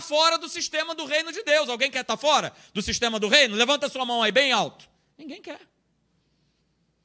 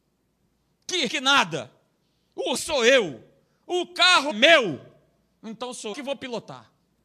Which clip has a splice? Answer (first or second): second